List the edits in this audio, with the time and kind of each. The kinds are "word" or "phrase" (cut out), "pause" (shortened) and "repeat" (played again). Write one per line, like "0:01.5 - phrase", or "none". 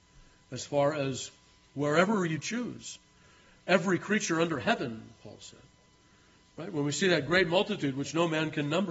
none